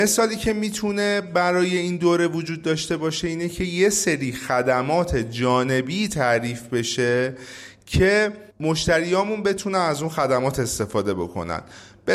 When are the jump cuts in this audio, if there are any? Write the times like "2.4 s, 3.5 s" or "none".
8.5 s